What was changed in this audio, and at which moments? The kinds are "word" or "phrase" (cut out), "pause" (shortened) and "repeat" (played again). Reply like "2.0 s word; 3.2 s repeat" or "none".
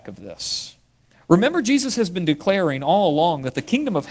1.0 s pause